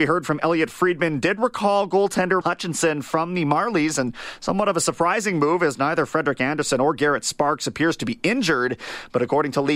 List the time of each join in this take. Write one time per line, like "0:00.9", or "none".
0:02.4